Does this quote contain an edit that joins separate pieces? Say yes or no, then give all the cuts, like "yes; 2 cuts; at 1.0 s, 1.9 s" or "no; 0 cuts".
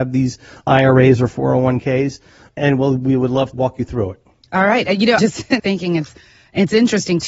yes; 3 cuts; at 3.5 s, 5.2 s, 5.6 s